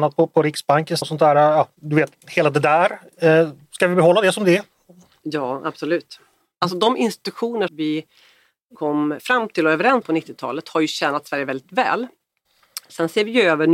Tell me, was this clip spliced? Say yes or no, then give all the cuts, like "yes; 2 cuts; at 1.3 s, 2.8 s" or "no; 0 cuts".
yes; 4 cuts; at 1.0 s, 7.7 s, 8.7 s, 10.0 s